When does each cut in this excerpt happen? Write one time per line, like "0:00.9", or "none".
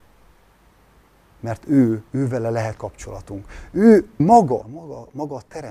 0:02.1
0:02.8
0:04.2
0:04.6